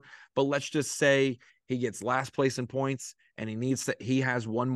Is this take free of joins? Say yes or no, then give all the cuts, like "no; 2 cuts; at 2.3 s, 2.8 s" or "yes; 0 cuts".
yes; 0 cuts